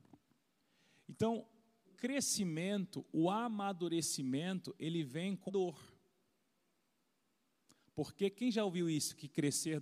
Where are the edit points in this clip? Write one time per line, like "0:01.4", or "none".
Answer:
0:01.8
0:05.5